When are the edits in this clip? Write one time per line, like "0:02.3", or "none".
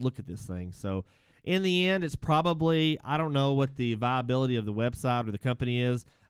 none